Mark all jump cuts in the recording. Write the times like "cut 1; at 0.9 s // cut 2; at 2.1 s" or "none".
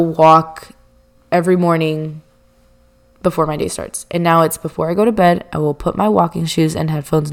none